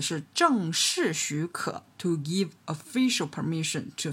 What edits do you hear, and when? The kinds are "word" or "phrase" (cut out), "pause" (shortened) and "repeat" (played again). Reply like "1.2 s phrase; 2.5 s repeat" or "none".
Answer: none